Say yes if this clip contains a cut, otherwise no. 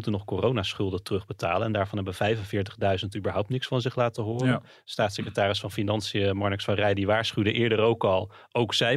no